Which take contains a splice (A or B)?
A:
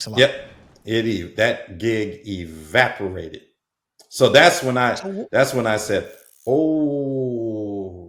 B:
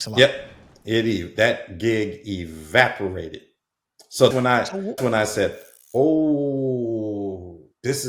B